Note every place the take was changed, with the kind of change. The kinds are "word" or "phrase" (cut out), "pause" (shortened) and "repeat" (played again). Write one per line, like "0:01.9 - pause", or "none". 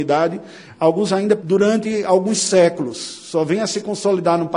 0:01.1 - word
0:01.4 - word